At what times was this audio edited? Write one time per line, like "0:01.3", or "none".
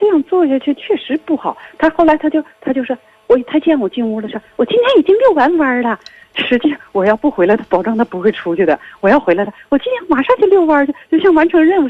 none